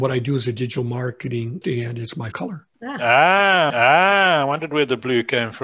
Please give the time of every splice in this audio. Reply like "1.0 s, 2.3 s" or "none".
1.6 s, 2.3 s, 2.7 s, 3.7 s